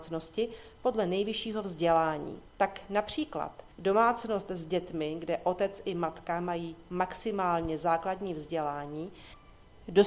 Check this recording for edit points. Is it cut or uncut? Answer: cut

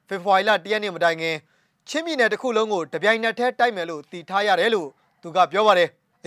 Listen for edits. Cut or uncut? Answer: uncut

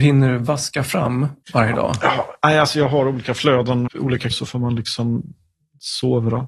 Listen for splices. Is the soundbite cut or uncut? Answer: cut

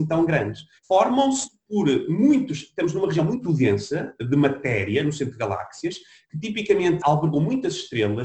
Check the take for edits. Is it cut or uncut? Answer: cut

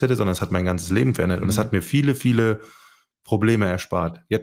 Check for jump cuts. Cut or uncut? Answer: uncut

